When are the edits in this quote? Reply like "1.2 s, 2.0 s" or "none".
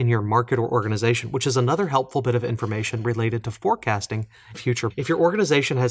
4.5 s, 4.9 s